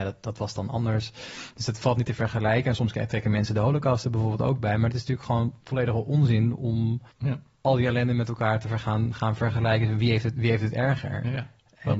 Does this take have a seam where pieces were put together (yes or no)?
yes